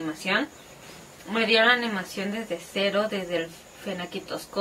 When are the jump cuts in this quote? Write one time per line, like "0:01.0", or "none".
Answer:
none